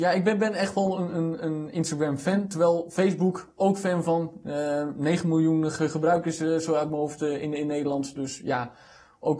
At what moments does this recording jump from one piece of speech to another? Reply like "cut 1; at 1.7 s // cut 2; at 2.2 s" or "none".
none

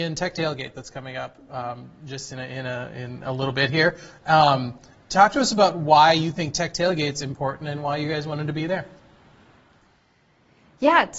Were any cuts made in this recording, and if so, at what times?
none

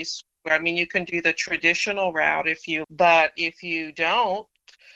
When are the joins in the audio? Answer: cut 1; at 2.8 s

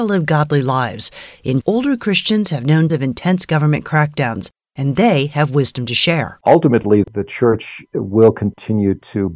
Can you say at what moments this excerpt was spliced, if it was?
cut 1; at 1.6 s // cut 2; at 2.9 s // cut 3; at 7.0 s

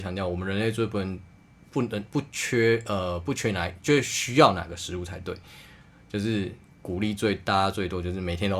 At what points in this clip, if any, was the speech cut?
none

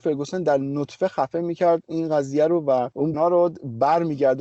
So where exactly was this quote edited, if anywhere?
cut 1; at 3.1 s

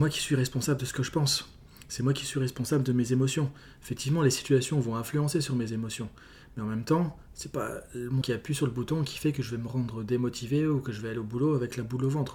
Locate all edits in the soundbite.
cut 1; at 8.2 s

